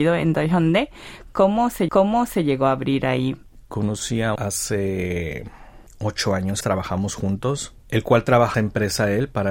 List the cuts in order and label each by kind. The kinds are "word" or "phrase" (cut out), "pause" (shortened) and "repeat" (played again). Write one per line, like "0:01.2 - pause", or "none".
0:01.9 - repeat
0:04.4 - phrase
0:06.6 - word
0:07.8 - pause
0:08.5 - phrase